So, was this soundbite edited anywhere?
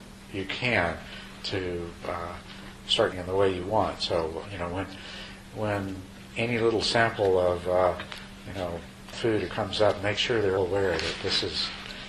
yes; 6 cuts; at 1.4 s, 3.1 s, 4.4 s, 9.1 s, 9.5 s, 10.6 s

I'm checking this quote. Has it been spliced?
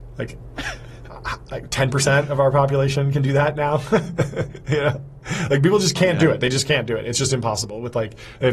no; 0 cuts

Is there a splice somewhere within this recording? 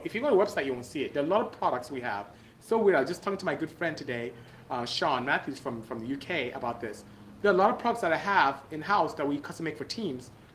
no; 0 cuts

